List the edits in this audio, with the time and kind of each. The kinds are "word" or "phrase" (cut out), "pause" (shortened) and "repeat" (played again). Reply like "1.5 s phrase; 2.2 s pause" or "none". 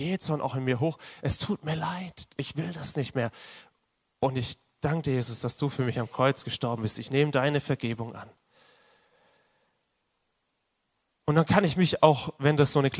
none